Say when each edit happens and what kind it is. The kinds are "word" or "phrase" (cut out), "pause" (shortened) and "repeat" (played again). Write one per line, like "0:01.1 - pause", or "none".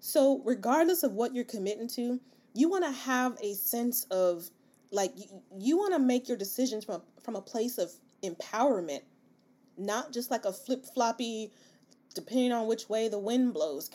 none